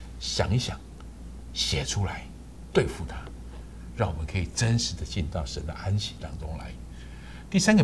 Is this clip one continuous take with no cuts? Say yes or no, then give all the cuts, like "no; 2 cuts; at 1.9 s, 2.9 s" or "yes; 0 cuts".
yes; 0 cuts